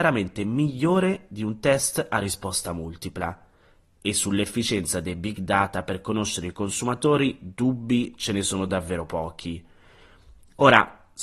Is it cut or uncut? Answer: uncut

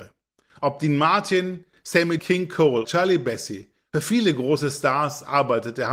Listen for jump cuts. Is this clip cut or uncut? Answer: cut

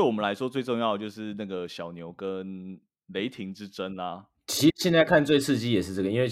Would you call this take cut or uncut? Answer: uncut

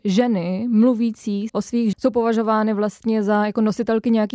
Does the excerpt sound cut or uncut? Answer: cut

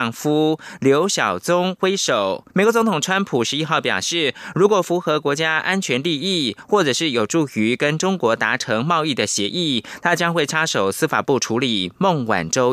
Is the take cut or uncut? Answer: cut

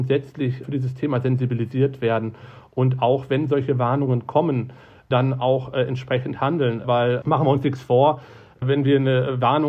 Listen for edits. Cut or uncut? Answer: uncut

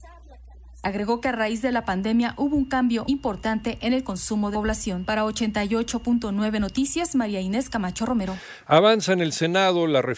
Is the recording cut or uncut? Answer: cut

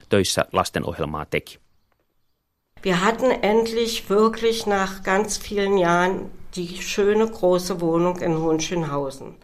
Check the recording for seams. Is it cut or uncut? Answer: uncut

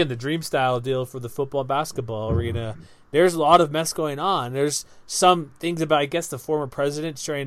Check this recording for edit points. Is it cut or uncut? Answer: uncut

